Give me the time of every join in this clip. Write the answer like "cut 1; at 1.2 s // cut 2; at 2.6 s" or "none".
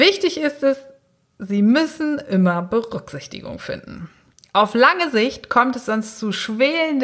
none